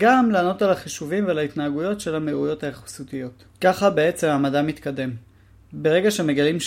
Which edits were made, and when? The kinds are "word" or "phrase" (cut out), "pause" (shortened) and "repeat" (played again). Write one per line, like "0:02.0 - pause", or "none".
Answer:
0:03.5 - pause